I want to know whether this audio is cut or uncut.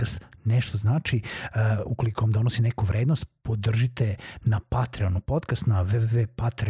uncut